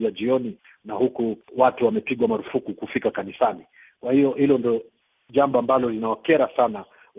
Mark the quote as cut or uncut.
uncut